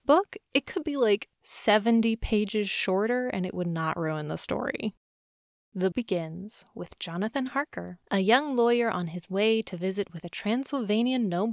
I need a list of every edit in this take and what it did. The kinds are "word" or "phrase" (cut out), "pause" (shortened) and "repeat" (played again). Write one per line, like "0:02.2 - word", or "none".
0:05.9 - word